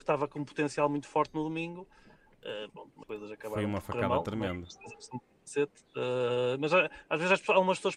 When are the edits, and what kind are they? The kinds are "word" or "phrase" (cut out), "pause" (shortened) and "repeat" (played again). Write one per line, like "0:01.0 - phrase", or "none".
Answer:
0:02.7 - word
0:03.0 - word
0:07.0 - phrase